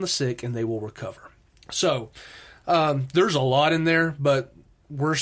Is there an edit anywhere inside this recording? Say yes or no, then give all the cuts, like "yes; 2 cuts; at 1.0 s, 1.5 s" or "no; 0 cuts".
yes; 1 cut; at 1.5 s